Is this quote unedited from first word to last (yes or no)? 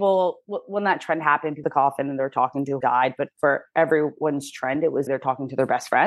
no